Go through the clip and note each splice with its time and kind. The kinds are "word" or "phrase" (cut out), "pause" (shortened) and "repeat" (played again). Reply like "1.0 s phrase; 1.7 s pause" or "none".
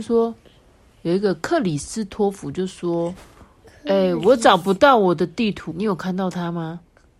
5.7 s word